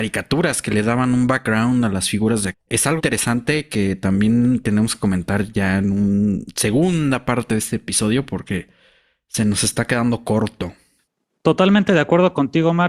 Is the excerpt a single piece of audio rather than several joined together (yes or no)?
no